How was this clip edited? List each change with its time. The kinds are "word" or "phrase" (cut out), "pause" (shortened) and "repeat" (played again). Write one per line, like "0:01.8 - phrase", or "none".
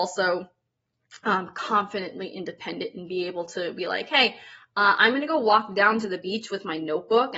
none

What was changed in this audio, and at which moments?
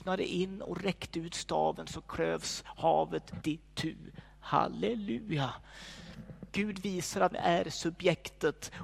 0:03.4 - word
0:06.5 - pause
0:07.3 - word

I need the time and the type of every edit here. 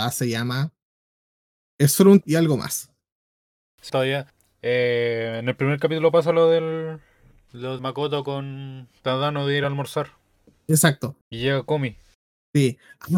0:02.2 - word
0:03.9 - word
0:07.8 - word
0:09.0 - pause
0:11.2 - pause

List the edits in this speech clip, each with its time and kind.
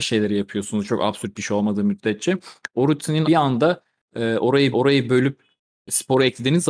0:03.2 - word
0:04.7 - repeat

